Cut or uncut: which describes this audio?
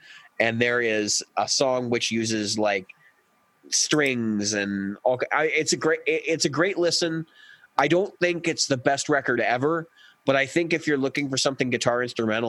uncut